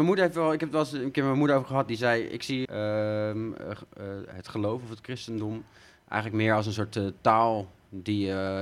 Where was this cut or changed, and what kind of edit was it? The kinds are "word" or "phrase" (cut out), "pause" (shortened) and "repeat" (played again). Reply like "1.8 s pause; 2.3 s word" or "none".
2.6 s word

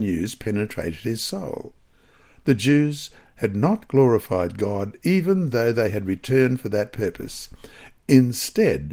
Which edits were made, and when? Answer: none

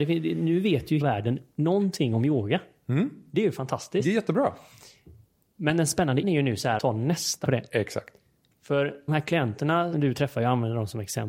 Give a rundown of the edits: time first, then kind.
1.0 s word; 6.2 s word; 6.8 s word; 7.4 s word; 9.1 s word; 9.9 s word

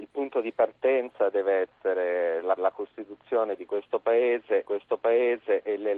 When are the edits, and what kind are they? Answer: 2.6 s repeat; 4.6 s repeat

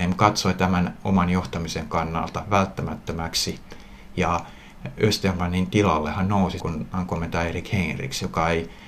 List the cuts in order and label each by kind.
6.6 s phrase

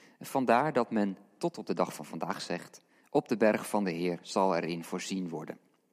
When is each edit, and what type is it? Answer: none

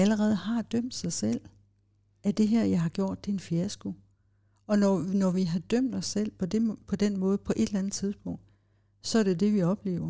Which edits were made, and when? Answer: none

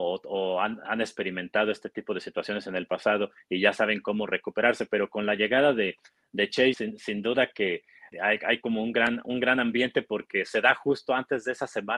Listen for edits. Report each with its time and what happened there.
6.7 s word; 8.1 s word

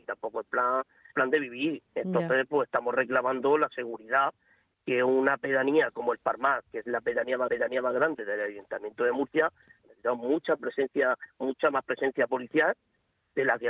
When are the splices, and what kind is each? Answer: 1.1 s word; 1.9 s pause; 7.5 s repeat; 9.8 s word

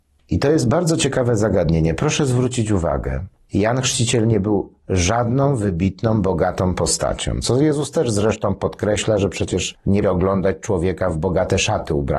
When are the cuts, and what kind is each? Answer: 10.0 s word

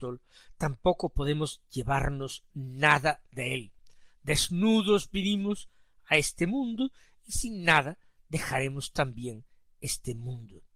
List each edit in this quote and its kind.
none

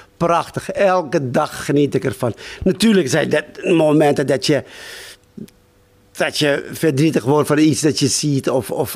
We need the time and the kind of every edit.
none

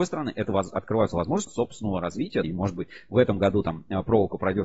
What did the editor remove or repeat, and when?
1.5 s word; 2.4 s word

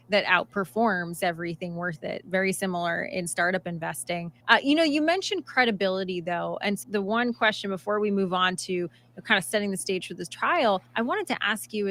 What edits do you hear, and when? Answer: 1.2 s phrase; 4.4 s pause; 6.8 s word; 10.9 s pause

